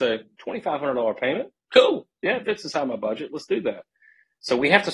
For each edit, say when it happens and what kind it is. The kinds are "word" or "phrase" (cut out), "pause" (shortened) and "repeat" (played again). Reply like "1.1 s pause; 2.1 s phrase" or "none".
none